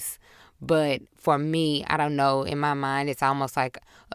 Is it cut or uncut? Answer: uncut